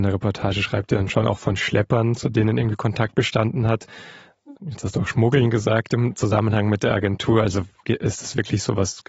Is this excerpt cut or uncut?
cut